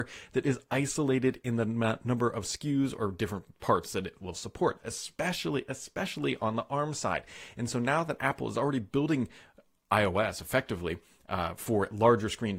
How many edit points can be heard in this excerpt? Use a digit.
0